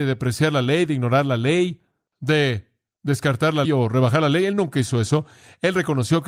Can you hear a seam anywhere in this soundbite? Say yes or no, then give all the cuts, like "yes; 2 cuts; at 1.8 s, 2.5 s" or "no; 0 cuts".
yes; 1 cut; at 3.6 s